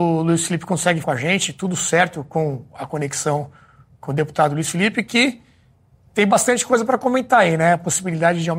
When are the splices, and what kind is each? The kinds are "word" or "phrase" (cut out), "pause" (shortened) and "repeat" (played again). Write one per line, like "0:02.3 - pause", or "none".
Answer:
0:01.0 - word